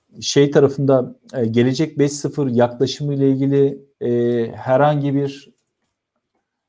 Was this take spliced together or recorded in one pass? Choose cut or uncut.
cut